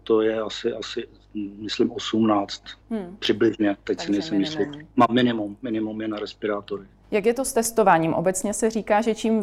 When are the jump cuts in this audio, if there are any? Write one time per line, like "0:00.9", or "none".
0:02.8
0:04.9